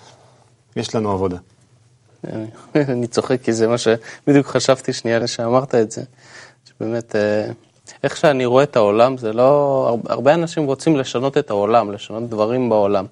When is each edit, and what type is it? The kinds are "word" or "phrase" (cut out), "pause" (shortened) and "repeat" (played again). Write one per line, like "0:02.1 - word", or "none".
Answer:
0:05.2 - word